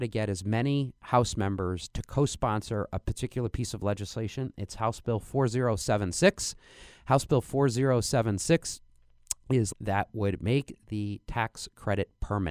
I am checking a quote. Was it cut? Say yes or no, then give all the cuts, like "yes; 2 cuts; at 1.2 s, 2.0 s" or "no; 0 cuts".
yes; 1 cut; at 9.7 s